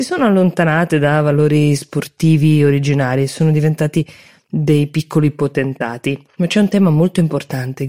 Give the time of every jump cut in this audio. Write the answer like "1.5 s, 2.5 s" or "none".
none